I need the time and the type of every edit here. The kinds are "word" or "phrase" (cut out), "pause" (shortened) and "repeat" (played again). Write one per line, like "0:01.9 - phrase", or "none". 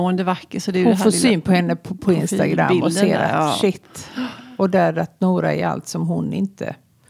none